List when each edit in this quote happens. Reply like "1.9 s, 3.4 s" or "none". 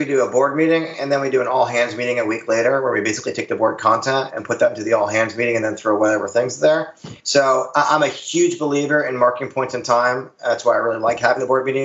7.2 s